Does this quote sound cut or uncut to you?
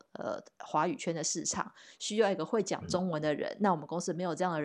uncut